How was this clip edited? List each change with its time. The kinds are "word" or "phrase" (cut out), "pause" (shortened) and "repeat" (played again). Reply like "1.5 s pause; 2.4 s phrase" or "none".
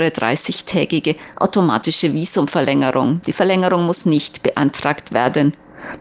none